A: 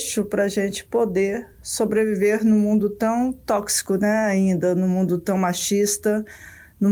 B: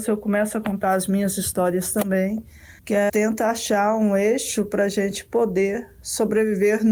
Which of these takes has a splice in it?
B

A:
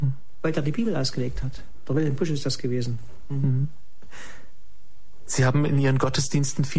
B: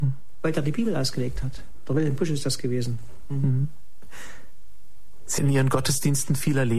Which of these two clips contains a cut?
B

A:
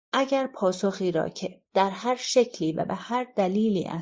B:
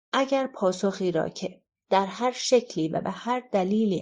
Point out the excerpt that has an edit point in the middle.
A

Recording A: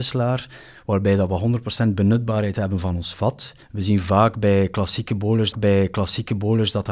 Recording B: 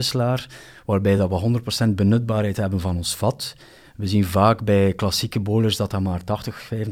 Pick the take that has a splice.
A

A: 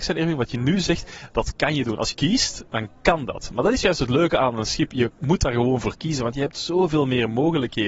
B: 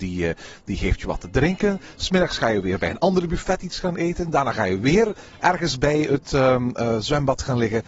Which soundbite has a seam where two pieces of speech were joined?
A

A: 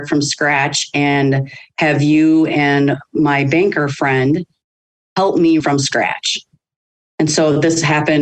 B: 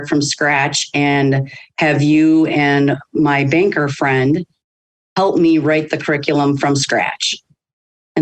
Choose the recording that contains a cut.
A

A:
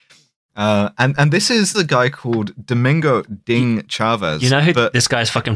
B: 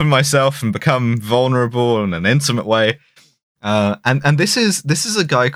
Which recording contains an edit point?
A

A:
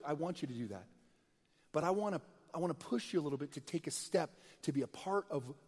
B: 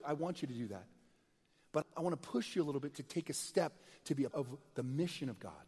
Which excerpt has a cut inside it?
B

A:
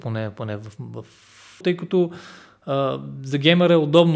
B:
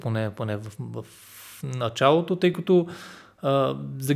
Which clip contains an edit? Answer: A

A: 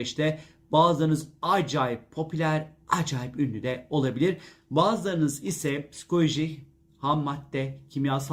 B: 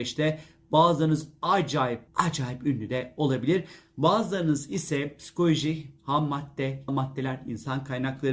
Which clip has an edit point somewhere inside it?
B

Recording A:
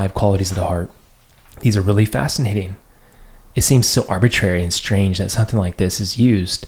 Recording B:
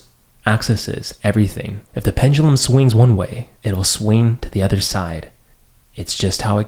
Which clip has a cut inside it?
B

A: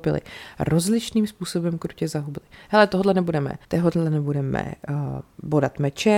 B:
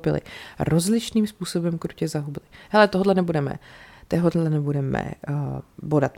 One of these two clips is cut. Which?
A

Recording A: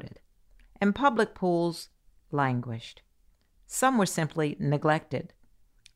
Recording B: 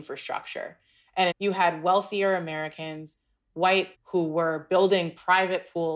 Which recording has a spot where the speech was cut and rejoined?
B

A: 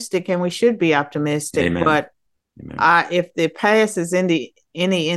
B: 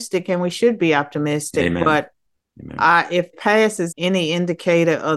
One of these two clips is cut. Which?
B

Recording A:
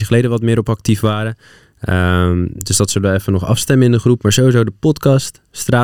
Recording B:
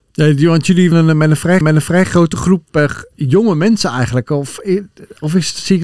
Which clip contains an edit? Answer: B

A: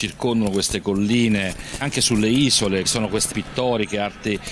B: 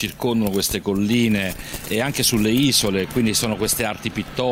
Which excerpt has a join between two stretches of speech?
A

